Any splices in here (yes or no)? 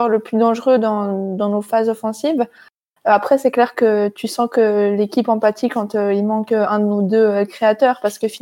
no